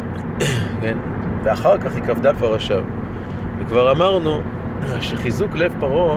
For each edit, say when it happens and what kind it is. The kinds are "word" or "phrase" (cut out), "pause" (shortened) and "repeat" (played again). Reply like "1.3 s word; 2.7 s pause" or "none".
2.3 s phrase